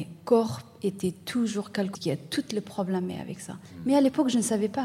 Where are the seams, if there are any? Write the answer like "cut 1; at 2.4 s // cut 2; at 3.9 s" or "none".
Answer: cut 1; at 1.9 s